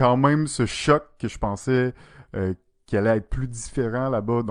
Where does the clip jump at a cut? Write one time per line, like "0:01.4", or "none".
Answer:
none